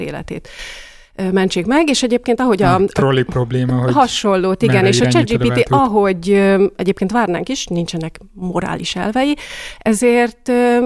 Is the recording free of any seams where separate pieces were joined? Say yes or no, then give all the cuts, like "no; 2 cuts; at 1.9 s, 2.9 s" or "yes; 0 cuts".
yes; 0 cuts